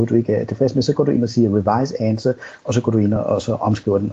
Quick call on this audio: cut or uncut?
uncut